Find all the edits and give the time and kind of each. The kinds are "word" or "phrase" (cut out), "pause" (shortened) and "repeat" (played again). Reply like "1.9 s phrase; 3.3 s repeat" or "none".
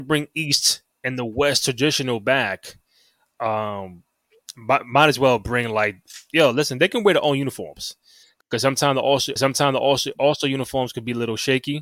9.4 s repeat